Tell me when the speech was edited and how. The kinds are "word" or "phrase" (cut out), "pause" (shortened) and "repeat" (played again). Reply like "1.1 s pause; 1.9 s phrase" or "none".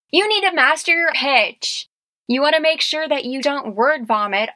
1.1 s word; 3.4 s word